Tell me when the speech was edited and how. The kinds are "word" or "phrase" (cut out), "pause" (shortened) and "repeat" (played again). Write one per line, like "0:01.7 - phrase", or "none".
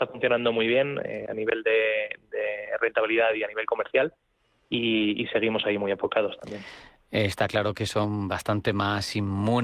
none

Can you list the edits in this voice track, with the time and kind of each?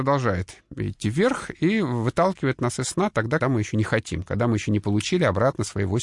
0:03.4 - word

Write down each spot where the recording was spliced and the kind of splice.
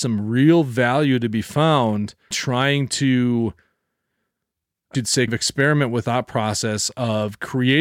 0:02.3 - word
0:04.9 - word
0:05.3 - word
0:06.0 - word

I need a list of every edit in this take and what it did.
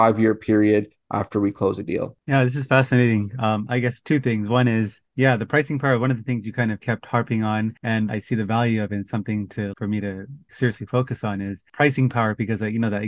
0:08.1 - word
0:09.7 - word
0:10.5 - word

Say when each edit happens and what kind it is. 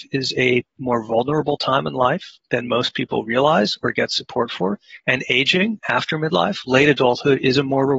0:02.4 - pause
0:05.0 - pause

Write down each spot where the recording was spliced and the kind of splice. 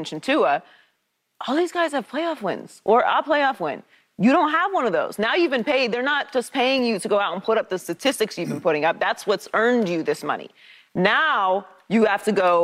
none

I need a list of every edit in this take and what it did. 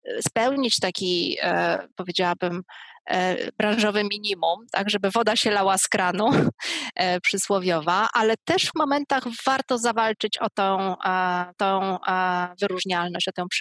0:01.9 - pause
0:08.7 - word
0:11.5 - repeat

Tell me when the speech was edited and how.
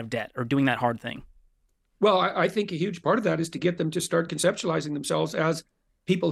none

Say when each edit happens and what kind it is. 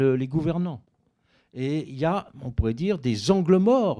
none

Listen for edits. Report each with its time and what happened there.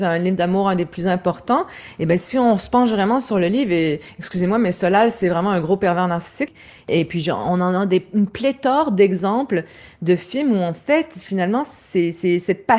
none

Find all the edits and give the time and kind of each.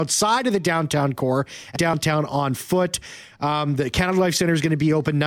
0:01.8 - word

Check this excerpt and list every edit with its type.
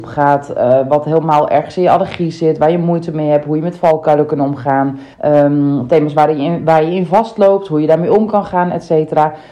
0:05.1 - pause

